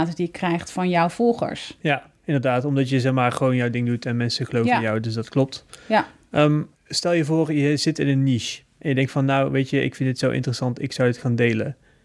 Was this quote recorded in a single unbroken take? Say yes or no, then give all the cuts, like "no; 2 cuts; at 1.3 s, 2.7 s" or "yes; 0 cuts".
no; 2 cuts; at 2.2 s, 6.8 s